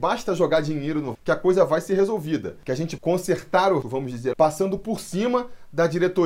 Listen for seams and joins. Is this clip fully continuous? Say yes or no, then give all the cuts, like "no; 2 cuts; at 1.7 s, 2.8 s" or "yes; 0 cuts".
no; 4 cuts; at 1.1 s, 3.0 s, 3.8 s, 4.3 s